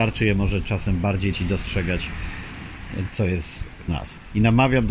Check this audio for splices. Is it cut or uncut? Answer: cut